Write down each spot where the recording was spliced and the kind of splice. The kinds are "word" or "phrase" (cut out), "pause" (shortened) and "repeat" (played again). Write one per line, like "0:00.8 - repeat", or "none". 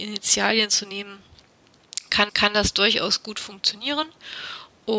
0:02.3 - repeat